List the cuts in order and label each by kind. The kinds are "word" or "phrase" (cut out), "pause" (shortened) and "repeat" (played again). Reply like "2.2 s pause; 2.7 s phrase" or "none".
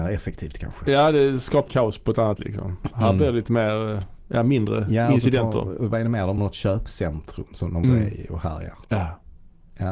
1.7 s word; 2.4 s word; 6.4 s word; 7.8 s word